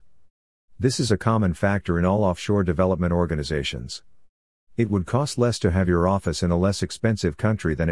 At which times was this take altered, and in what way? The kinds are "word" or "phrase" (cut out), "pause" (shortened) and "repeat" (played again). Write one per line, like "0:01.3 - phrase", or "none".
none